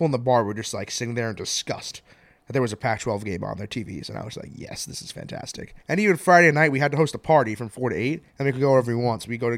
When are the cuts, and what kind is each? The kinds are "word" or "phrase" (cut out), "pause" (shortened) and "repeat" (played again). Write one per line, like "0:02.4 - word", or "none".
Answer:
0:05.8 - pause
0:08.3 - pause